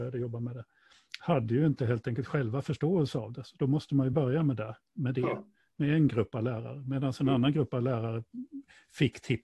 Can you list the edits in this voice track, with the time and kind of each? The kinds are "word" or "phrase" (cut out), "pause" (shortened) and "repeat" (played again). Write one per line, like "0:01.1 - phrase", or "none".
none